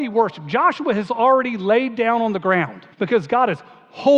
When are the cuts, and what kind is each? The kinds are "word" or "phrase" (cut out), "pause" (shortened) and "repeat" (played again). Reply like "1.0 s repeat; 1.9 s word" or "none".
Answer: 2.9 s pause